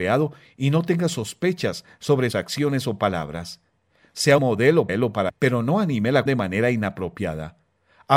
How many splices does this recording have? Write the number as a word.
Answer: five